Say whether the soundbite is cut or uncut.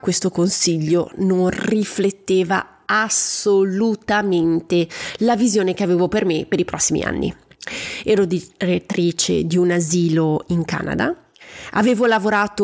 uncut